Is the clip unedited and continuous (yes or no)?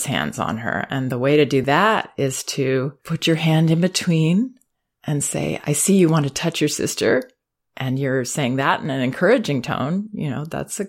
yes